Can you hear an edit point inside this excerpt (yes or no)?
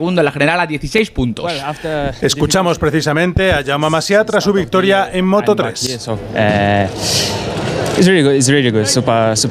no